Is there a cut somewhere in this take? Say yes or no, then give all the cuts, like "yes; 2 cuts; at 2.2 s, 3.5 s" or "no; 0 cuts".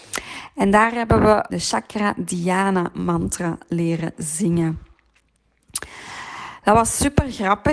yes; 1 cut; at 1.5 s